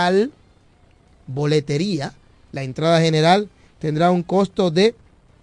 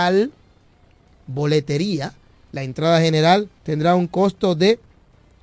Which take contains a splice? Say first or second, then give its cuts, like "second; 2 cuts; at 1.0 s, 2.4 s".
second; 1 cut; at 3.6 s